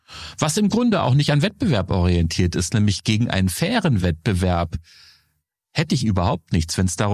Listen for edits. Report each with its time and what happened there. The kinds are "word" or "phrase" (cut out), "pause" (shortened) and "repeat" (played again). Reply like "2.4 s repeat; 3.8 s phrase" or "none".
none